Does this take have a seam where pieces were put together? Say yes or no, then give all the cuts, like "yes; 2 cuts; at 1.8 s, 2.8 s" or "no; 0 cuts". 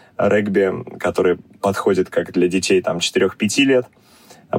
no; 0 cuts